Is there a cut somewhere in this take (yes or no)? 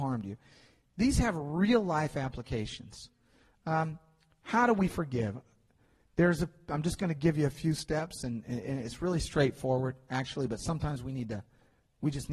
no